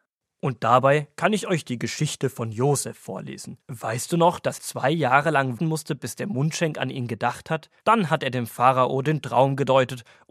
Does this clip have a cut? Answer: yes; 4 cuts; at 3.6 s, 4.6 s, 5.6 s, 7.8 s

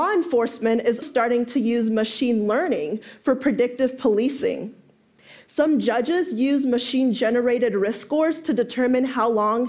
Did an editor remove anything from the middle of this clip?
yes; 1 cut; at 1.0 s

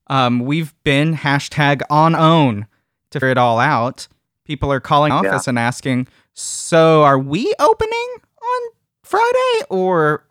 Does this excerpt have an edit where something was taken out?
yes; 3 cuts; at 2.2 s, 3.2 s, 5.1 s

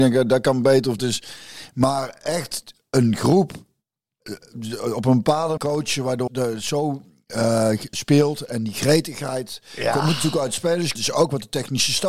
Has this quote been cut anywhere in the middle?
yes; 5 cuts; at 1.0 s, 5.6 s, 6.3 s, 7.9 s, 11.0 s

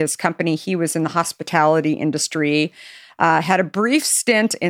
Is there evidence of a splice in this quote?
no; 0 cuts

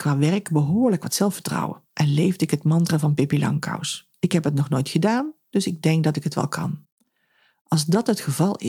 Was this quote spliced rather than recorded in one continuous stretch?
no; 0 cuts

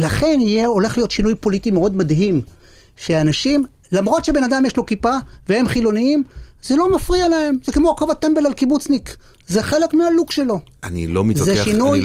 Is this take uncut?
yes; 0 cuts

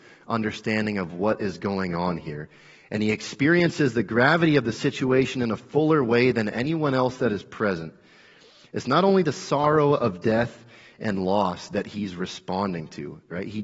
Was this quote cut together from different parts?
no; 0 cuts

